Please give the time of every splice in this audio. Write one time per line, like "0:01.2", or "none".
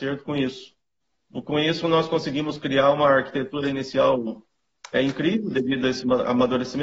none

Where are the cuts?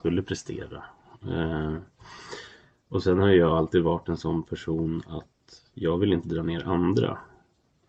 none

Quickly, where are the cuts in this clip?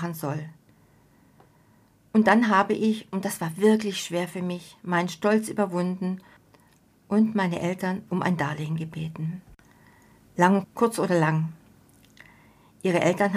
0:10.6

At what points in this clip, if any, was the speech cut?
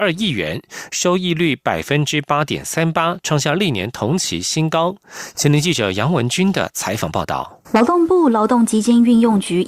0:07.6

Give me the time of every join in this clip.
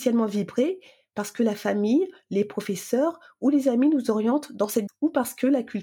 0:04.9

